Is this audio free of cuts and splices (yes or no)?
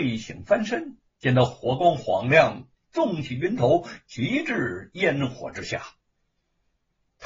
yes